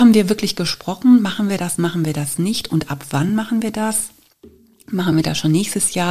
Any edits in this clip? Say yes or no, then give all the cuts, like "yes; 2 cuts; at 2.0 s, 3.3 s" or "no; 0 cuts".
no; 0 cuts